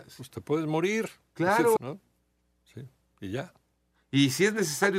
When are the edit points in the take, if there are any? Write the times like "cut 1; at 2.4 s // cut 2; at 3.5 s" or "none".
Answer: cut 1; at 1.8 s